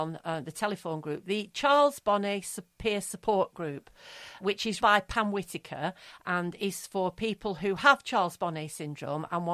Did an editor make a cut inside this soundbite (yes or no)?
yes